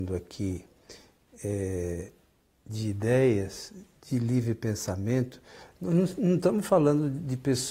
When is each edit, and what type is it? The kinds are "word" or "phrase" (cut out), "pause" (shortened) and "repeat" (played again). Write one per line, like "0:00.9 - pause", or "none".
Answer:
none

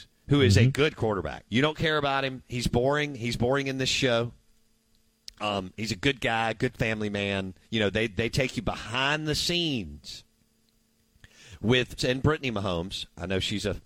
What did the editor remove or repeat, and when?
0:01.5 - pause
0:07.6 - pause
0:12.0 - word

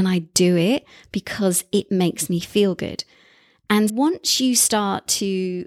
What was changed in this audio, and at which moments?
0:03.9 - word

